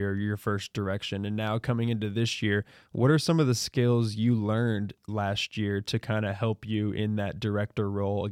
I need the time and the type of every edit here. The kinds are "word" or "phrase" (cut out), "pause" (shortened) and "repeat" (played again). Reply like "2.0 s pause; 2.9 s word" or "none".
none